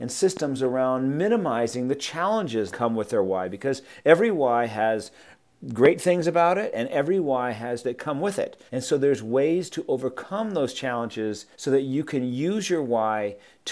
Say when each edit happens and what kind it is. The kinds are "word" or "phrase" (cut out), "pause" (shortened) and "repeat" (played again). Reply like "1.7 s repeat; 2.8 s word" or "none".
2.7 s word; 7.8 s word; 8.7 s pause; 11.5 s pause